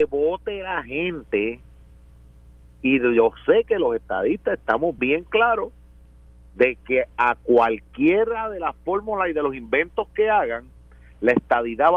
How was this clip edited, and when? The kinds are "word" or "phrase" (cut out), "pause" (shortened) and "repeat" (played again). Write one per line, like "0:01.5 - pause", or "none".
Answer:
0:05.0 - word